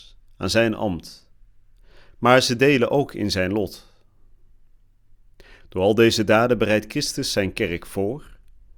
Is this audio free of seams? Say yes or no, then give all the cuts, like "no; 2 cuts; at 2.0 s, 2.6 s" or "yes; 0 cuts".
yes; 0 cuts